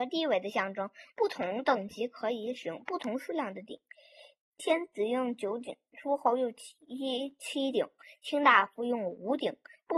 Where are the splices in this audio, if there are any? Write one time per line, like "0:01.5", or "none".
none